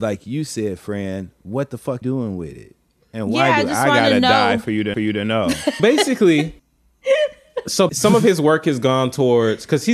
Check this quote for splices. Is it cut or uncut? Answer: cut